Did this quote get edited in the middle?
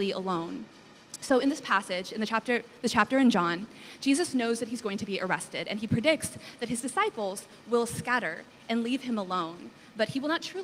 no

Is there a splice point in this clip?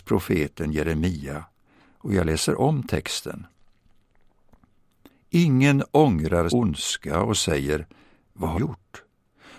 yes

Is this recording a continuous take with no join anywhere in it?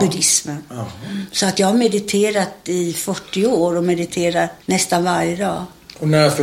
no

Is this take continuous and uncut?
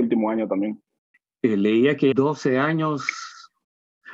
no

